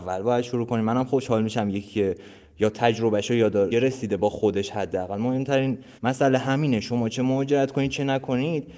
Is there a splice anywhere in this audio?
yes; 2 cuts; at 3.7 s, 6.0 s

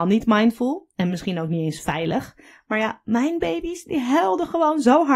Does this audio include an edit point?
no; 0 cuts

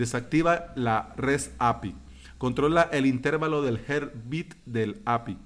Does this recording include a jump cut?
no; 0 cuts

